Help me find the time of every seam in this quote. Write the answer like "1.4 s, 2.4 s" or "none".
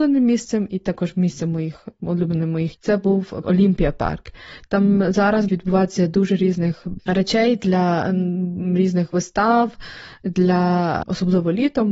2.7 s, 3.4 s, 5.5 s, 7.0 s